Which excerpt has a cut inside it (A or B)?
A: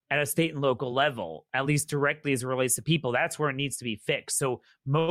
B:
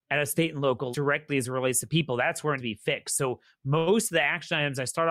B